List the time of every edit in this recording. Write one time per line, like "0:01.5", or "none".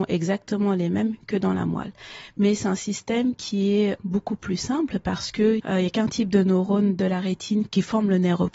0:04.0